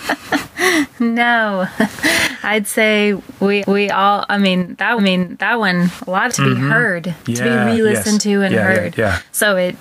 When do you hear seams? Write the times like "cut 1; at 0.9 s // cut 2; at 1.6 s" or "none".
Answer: cut 1; at 3.6 s // cut 2; at 5.0 s // cut 3; at 6.3 s // cut 4; at 7.8 s